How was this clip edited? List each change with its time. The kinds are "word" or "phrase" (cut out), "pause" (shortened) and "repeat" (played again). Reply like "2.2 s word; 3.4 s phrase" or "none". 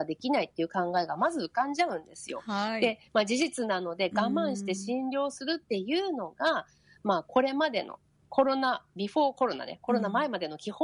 none